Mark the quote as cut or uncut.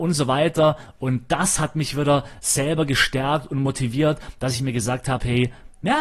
uncut